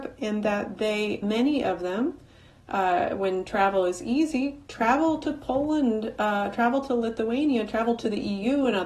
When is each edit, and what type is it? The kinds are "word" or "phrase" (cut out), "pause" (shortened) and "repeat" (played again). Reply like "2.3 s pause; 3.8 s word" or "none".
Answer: 1.2 s word